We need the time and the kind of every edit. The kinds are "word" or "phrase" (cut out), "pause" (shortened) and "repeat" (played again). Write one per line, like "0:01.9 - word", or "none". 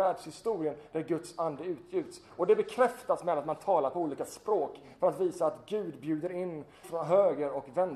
0:06.8 - word